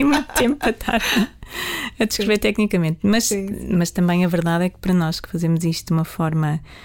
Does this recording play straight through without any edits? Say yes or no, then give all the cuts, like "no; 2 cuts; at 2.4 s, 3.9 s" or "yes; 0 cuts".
yes; 0 cuts